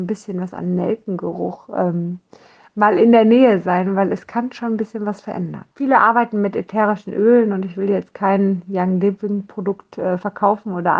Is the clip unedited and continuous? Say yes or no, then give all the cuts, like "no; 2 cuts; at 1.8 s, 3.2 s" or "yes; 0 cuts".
no; 1 cut; at 5.7 s